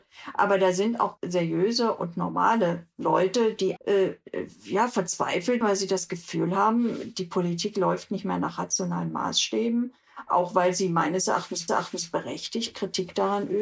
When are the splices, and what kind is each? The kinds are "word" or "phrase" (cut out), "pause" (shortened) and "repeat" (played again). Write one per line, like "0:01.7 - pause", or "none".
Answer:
0:01.2 - word
0:03.8 - word
0:05.6 - word
0:11.7 - repeat